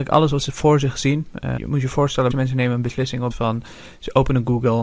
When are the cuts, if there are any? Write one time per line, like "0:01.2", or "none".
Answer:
0:01.6
0:02.3
0:03.3